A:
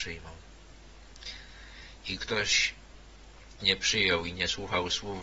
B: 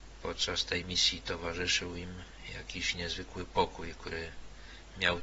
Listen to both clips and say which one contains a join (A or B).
A